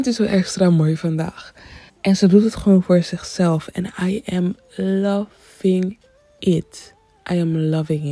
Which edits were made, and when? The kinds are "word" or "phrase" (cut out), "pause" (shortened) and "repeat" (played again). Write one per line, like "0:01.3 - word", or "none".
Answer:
0:01.9 - pause